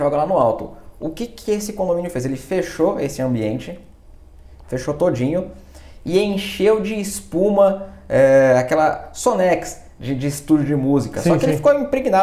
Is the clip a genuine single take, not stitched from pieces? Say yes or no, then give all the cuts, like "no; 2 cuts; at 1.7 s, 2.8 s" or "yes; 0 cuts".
yes; 0 cuts